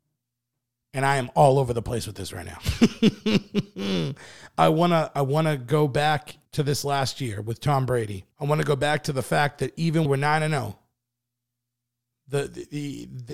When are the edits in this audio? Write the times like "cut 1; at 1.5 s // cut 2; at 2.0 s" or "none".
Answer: cut 1; at 6.4 s // cut 2; at 8.3 s // cut 3; at 10.1 s